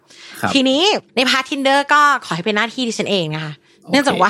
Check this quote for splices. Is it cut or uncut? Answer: cut